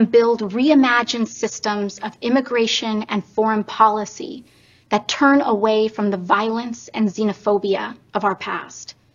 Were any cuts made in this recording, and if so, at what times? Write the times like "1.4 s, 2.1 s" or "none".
none